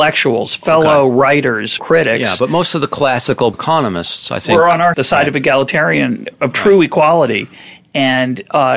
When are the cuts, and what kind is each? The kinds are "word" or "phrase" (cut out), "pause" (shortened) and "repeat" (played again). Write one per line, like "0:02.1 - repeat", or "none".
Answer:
0:01.8 - phrase
0:03.5 - word
0:04.9 - word